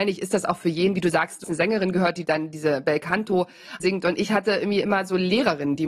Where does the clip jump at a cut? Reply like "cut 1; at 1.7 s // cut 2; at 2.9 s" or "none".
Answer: cut 1; at 1.4 s // cut 2; at 3.8 s